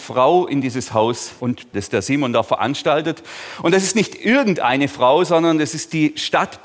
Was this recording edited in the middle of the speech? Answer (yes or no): yes